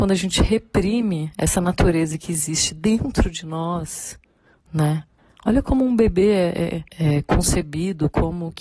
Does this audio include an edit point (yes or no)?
yes